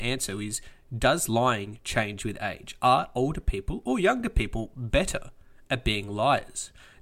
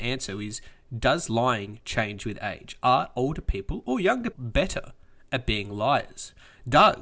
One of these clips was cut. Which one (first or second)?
second